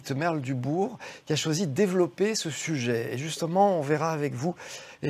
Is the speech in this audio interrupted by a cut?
no; 0 cuts

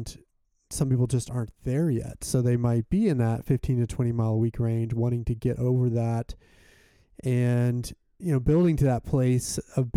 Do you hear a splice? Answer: no; 0 cuts

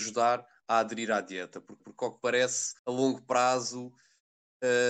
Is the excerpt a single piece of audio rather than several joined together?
no; 2 cuts; at 1.8 s, 2.8 s

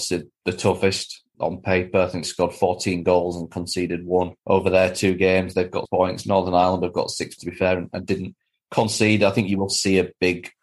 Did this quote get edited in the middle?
yes; 5 cuts; at 1.3 s, 2.2 s, 4.4 s, 5.9 s, 7.4 s

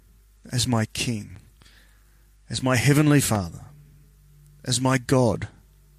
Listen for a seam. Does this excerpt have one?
no; 0 cuts

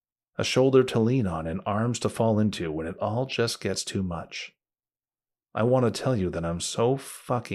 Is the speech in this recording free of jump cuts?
yes; 0 cuts

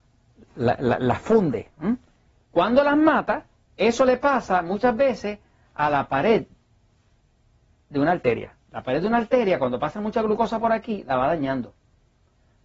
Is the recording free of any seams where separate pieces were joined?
yes; 0 cuts

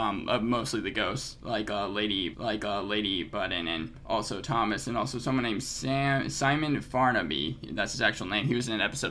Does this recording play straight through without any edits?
no; 1 cut; at 2.3 s

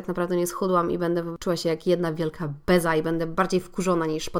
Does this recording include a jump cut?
no; 0 cuts

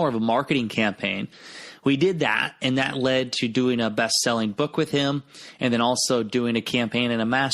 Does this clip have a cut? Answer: no; 0 cuts

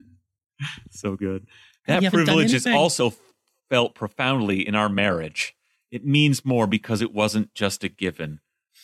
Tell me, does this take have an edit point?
no; 0 cuts

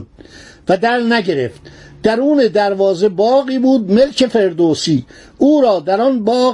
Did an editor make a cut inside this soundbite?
no; 0 cuts

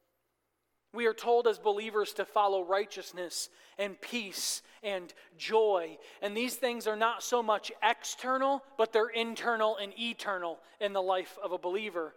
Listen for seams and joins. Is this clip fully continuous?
yes; 0 cuts

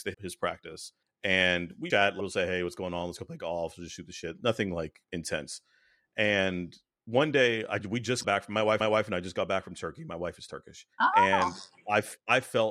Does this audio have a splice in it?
yes; 6 cuts; at 1.0 s, 1.9 s, 5.0 s, 8.2 s, 8.8 s, 10.9 s

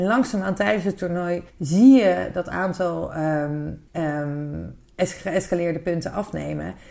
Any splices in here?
yes; 2 cuts; at 1.5 s, 3.9 s

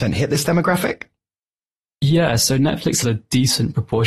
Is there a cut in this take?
yes; 1 cut; at 3.0 s

